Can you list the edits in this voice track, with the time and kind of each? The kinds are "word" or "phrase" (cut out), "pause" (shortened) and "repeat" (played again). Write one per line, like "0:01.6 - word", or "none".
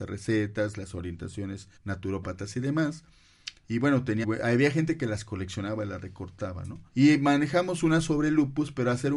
0:01.8 - pause
0:04.2 - word
0:06.9 - pause